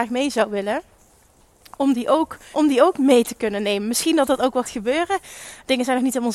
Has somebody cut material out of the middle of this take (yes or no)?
yes